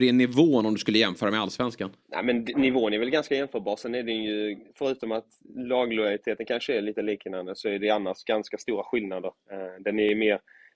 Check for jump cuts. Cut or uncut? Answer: cut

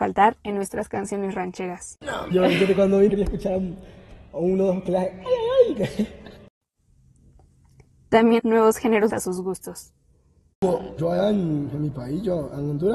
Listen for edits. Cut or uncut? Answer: cut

